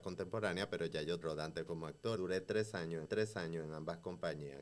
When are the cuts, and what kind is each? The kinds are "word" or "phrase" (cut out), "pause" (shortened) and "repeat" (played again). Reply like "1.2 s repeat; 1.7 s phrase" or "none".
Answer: 1.2 s phrase; 2.2 s word; 3.1 s repeat